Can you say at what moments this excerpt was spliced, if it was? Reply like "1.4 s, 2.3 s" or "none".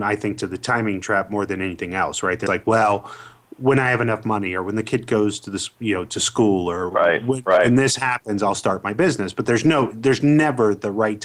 2.5 s